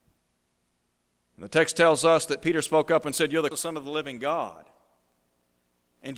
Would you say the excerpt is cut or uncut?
cut